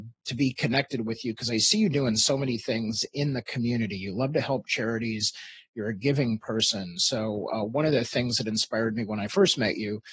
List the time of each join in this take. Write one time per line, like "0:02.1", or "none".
none

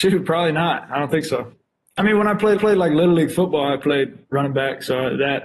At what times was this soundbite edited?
0:02.6

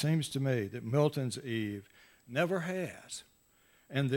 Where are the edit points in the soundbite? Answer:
none

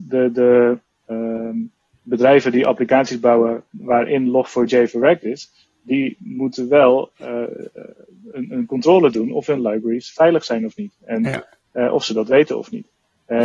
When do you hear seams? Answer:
none

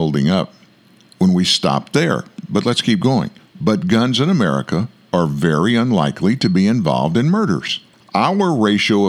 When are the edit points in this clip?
0:03.4
0:07.9

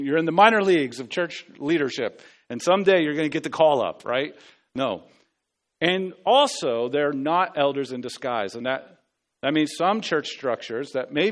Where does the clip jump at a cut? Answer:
none

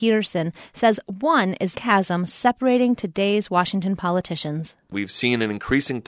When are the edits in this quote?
0:01.7

